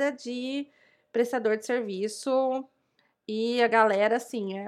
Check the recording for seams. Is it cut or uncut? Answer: uncut